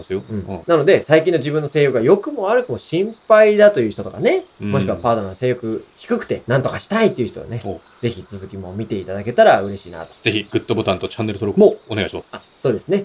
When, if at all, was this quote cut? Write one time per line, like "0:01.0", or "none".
none